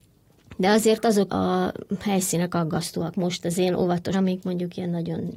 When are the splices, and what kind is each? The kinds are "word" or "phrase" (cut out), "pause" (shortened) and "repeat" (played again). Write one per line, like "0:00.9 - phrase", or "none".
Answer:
0:01.3 - word
0:03.1 - word
0:04.1 - phrase